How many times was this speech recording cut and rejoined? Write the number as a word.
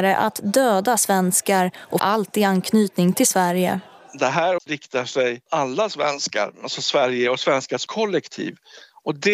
four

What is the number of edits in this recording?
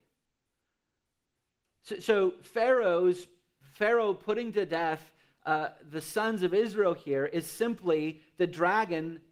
zero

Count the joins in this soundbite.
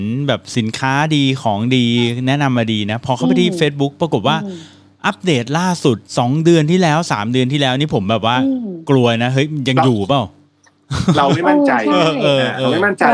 one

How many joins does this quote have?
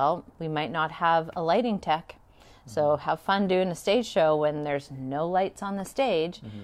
zero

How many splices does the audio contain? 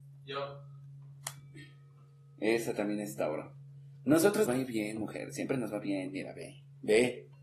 one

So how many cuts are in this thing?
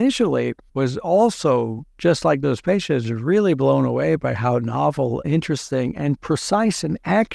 two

